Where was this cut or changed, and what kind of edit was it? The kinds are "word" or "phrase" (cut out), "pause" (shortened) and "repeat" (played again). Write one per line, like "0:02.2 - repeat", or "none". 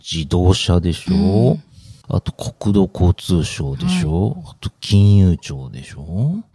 0:02.0 - pause